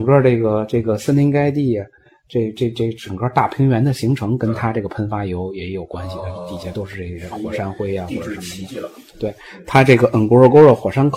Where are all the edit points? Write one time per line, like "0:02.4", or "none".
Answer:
none